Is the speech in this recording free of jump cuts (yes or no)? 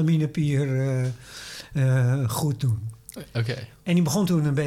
yes